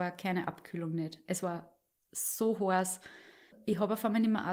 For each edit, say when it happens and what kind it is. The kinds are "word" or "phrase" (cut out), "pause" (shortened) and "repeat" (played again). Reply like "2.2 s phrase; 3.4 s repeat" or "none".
none